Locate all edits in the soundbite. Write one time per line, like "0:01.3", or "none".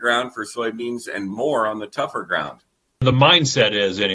none